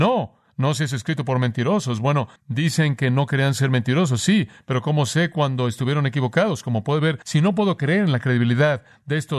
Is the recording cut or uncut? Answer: cut